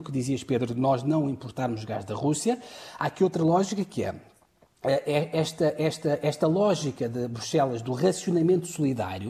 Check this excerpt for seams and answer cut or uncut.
uncut